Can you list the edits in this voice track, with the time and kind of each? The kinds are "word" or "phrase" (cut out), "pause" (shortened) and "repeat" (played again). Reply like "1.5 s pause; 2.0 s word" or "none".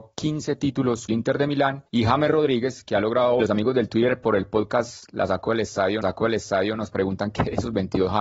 1.1 s phrase; 1.9 s pause; 3.4 s phrase; 6.0 s repeat